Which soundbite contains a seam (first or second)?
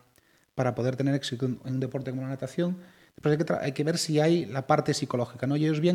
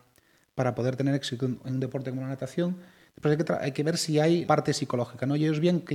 second